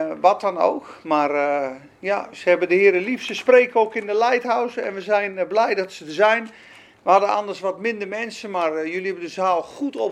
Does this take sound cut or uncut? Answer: uncut